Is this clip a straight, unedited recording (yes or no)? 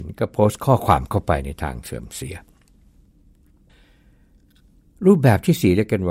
yes